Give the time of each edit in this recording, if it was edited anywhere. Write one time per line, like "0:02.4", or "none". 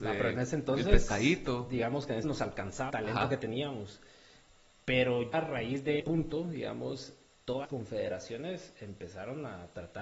0:02.2
0:02.9
0:05.3
0:06.0
0:07.6